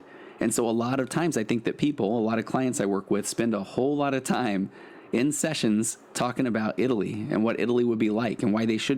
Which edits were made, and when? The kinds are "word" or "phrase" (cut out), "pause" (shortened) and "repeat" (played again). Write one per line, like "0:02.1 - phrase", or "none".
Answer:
none